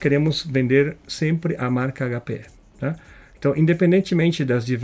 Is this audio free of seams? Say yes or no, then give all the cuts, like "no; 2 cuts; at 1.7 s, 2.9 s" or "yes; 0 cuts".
yes; 0 cuts